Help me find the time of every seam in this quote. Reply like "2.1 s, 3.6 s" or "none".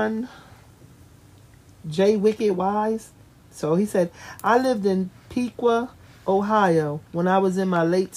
3.2 s, 7.1 s